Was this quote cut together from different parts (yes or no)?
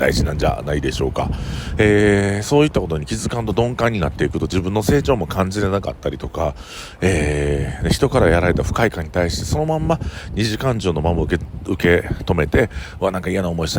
no